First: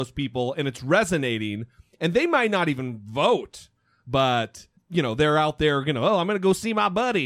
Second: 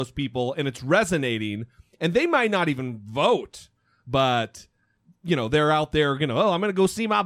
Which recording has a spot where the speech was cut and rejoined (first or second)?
first